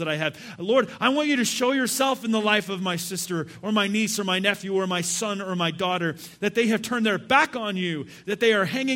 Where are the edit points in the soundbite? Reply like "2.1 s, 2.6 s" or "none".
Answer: none